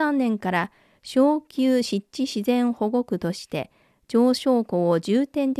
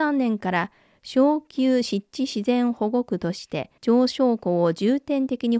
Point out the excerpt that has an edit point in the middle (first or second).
second